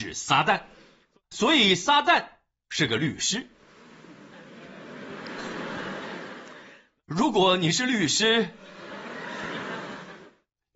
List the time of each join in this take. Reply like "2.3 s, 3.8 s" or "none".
none